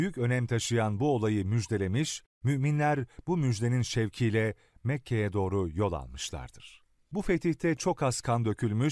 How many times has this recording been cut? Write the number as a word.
zero